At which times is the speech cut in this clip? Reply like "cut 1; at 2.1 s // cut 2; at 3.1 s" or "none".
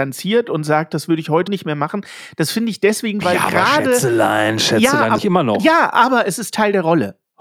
cut 1; at 1.5 s // cut 2; at 3.2 s // cut 3; at 5.2 s